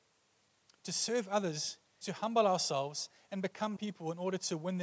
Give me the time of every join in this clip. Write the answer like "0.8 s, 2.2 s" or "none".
2.0 s, 3.8 s